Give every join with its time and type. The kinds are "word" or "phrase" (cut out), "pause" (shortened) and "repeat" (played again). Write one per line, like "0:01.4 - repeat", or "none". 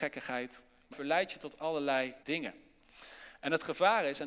0:00.9 - word
0:02.2 - pause